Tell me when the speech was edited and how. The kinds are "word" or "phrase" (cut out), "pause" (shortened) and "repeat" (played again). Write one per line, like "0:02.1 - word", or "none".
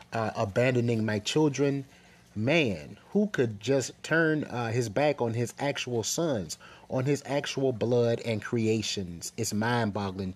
none